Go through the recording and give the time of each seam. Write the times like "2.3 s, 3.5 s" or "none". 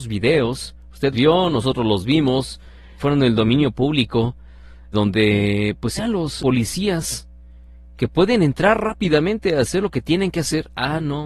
1.1 s, 3.0 s, 4.9 s, 6.0 s, 6.4 s